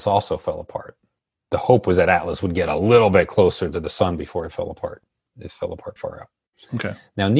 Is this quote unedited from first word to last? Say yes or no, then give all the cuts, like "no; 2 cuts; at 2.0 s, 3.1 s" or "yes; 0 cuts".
no; 1 cut; at 6.0 s